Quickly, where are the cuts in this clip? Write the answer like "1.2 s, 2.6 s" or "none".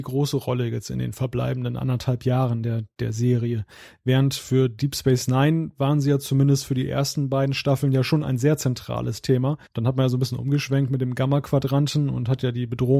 9.7 s